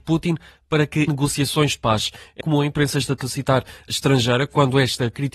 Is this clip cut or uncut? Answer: cut